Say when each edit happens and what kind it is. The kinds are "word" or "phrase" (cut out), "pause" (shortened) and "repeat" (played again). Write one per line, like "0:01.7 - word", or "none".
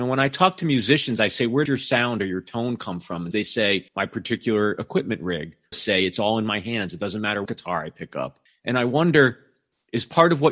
0:01.7 - word
0:03.3 - word
0:03.9 - pause
0:05.7 - phrase
0:07.5 - word
0:08.5 - pause

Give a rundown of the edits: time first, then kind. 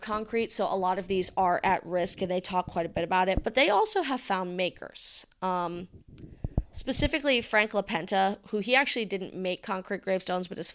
none

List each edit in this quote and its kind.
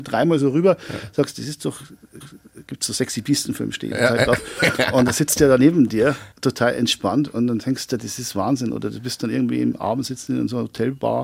0:02.2 - repeat
0:06.3 - pause

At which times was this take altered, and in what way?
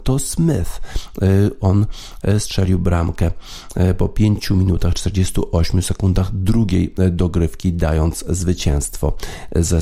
none

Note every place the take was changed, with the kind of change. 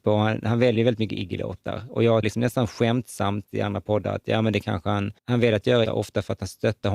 0:02.2 - word
0:03.5 - word
0:05.2 - pause
0:05.9 - word

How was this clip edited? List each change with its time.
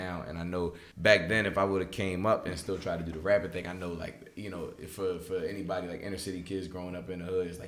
0:00.9 - pause

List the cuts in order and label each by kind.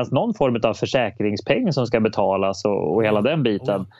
none

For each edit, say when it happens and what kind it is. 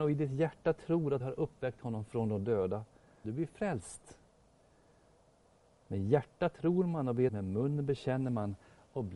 0:01.2 - word
0:03.2 - word
0:07.3 - word

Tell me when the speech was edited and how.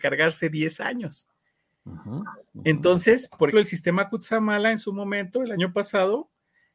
0:03.5 - word

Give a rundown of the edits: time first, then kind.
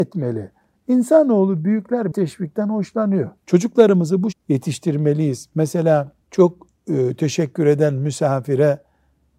0:02.1 - word
0:03.4 - pause
0:04.3 - word
0:06.2 - pause

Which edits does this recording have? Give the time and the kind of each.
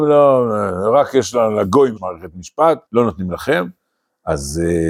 0:02.0 - word
0:02.9 - pause

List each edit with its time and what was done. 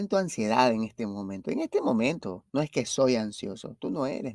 0:02.5 - pause

